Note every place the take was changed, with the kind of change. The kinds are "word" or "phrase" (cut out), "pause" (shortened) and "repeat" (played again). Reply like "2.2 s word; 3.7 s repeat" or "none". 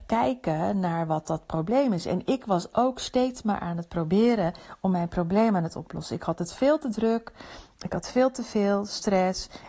none